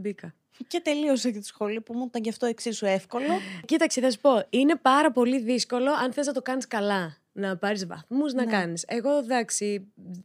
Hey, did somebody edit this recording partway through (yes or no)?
yes